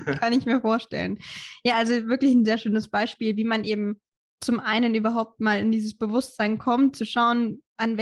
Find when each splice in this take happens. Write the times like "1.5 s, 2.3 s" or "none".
none